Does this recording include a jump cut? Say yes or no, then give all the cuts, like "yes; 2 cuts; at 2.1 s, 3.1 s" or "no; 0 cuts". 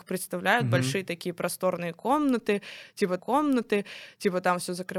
yes; 1 cut; at 3.2 s